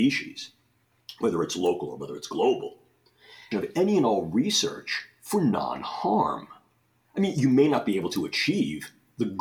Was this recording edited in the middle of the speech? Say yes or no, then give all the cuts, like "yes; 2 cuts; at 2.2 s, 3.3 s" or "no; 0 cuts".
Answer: yes; 1 cut; at 3.5 s